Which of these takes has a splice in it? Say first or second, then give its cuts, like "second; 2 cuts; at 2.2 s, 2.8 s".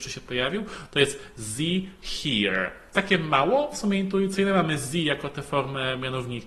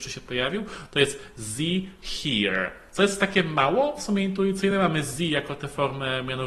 first; 1 cut; at 2.9 s